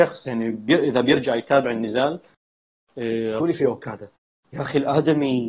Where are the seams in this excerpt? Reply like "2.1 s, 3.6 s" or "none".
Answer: 3.4 s